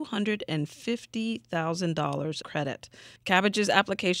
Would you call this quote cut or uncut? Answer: cut